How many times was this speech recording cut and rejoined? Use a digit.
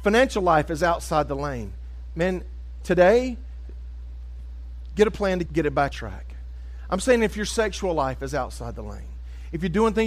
2